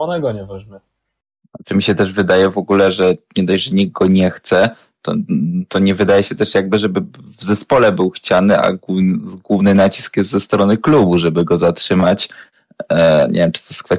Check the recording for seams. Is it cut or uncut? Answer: uncut